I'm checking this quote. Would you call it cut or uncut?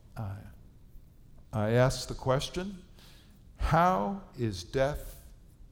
uncut